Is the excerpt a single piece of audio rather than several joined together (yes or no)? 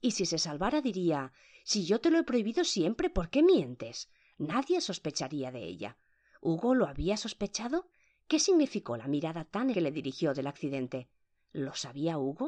no